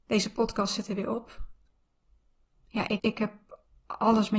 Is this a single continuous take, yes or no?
no